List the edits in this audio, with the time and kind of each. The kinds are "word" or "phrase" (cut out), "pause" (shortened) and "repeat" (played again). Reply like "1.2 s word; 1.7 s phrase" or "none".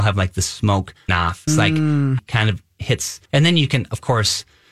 1.1 s word; 1.5 s word; 2.2 s phrase; 3.3 s pause